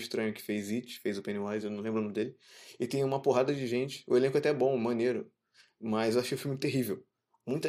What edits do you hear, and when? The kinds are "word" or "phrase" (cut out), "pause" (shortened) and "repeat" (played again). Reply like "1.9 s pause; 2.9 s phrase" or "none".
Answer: none